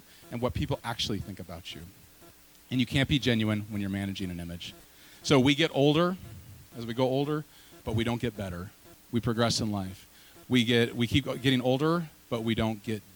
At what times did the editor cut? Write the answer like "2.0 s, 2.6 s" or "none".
7.8 s